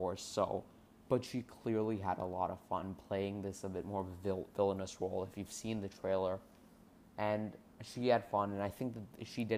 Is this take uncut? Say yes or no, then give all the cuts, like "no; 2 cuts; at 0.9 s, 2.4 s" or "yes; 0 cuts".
yes; 0 cuts